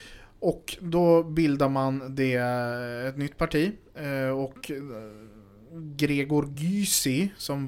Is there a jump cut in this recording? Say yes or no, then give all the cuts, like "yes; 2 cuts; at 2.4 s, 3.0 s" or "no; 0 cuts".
no; 0 cuts